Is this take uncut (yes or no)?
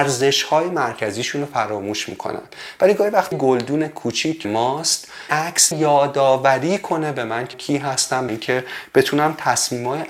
no